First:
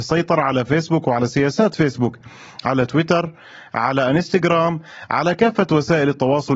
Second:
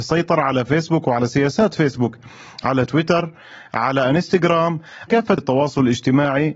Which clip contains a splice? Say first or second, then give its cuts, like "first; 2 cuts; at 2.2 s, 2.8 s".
second; 2 cuts; at 5.1 s, 5.4 s